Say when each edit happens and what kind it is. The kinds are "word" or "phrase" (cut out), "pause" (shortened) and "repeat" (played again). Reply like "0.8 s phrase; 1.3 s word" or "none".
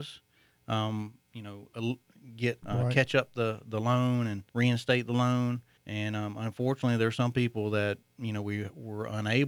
2.6 s phrase; 4.5 s pause; 5.8 s pause